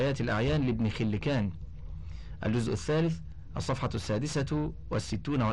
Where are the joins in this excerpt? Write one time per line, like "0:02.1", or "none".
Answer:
none